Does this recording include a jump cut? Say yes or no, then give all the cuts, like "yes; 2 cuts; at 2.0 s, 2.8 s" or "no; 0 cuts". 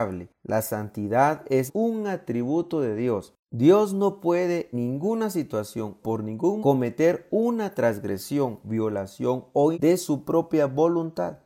yes; 6 cuts; at 1.7 s, 4.7 s, 6.0 s, 6.6 s, 8.6 s, 9.7 s